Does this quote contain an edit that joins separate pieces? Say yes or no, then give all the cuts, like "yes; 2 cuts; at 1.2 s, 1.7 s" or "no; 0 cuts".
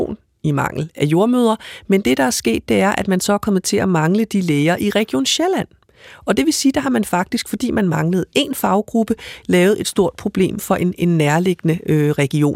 no; 0 cuts